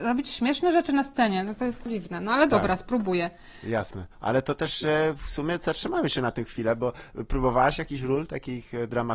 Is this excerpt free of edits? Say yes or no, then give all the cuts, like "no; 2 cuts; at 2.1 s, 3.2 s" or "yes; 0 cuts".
no; 1 cut; at 4.1 s